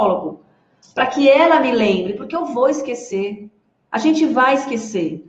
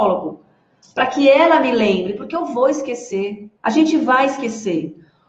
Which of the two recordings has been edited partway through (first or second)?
second